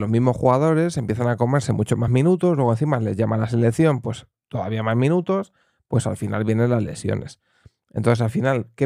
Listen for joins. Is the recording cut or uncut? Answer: uncut